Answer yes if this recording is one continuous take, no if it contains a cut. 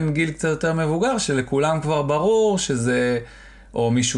yes